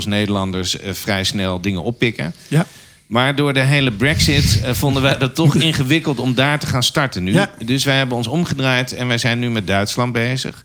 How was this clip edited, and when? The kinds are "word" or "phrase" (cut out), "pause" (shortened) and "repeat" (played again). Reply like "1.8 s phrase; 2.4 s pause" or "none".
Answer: none